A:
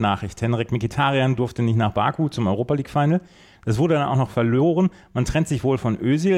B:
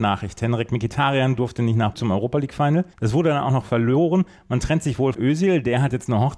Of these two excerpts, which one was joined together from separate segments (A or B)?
B